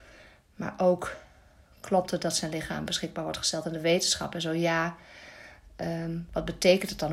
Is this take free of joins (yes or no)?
yes